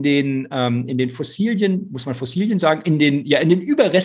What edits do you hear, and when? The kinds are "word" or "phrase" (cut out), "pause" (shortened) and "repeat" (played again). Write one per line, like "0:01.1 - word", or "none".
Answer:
none